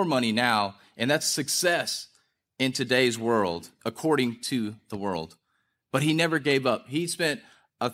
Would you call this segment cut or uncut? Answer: uncut